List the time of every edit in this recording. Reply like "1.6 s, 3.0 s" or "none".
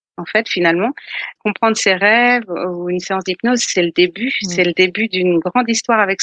1.4 s